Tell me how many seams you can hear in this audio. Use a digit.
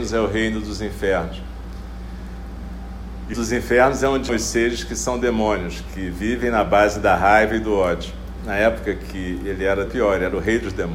4